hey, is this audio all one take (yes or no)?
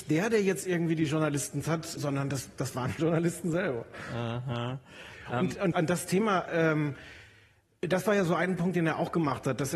no